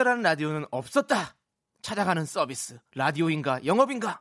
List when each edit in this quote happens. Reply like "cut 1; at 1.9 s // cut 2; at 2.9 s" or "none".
none